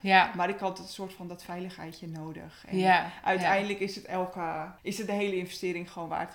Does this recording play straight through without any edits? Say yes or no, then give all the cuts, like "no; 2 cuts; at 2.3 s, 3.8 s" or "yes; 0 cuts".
no; 1 cut; at 4.8 s